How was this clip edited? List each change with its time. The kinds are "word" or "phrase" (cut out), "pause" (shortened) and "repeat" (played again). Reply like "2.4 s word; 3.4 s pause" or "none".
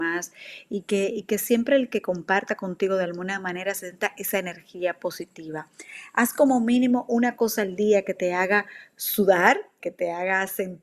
9.8 s word